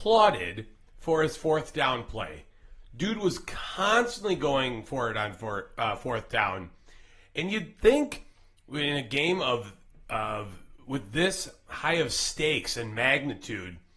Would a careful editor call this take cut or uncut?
uncut